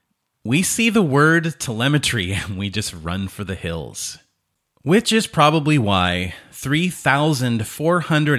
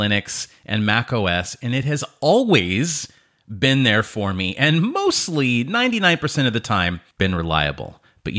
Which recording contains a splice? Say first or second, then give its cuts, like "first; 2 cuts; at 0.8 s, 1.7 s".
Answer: second; 1 cut; at 7.1 s